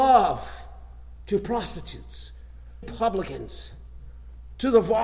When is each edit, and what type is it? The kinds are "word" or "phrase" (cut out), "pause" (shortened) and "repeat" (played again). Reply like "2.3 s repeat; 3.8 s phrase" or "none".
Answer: 2.8 s word